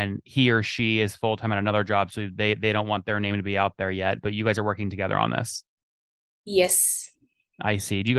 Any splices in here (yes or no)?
no